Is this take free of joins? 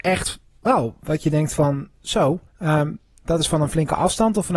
no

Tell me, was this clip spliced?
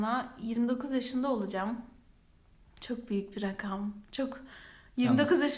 no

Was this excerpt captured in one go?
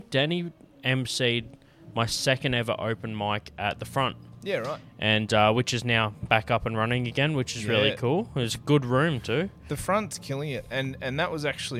yes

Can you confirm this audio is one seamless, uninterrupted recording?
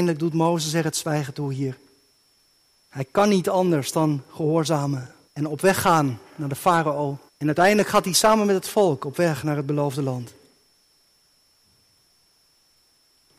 no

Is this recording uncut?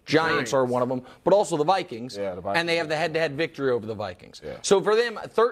yes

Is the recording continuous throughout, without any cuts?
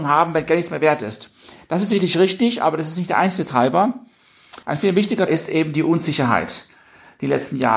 no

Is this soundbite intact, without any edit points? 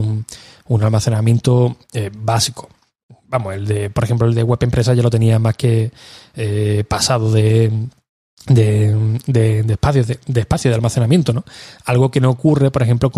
yes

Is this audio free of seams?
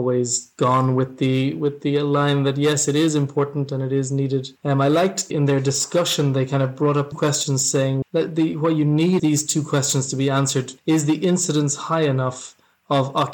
no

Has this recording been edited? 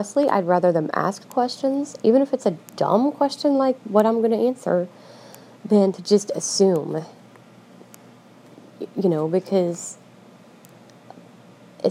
no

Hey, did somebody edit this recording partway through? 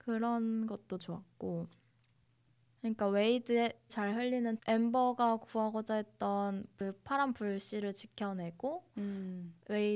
yes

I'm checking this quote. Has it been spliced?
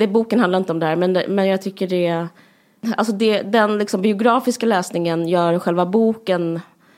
no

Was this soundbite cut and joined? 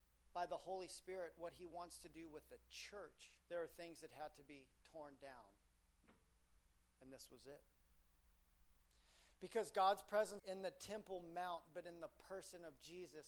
yes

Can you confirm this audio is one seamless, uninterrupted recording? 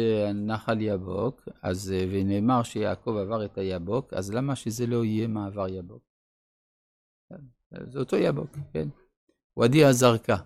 yes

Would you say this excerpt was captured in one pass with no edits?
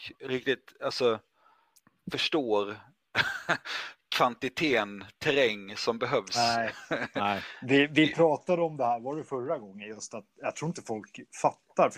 yes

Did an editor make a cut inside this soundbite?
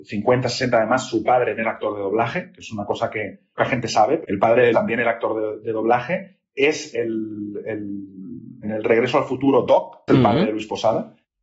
yes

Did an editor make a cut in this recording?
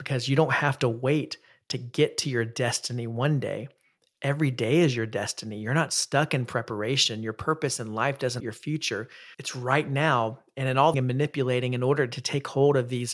yes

